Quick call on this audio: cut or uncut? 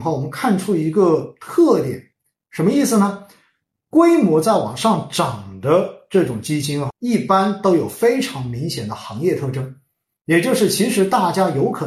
cut